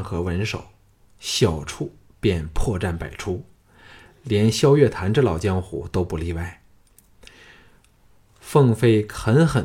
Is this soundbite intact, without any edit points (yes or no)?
yes